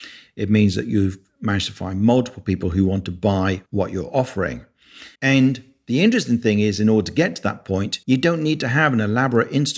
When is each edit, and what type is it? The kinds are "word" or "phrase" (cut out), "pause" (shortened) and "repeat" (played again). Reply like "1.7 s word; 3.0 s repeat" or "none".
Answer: 3.7 s pause; 5.1 s pause; 8.0 s pause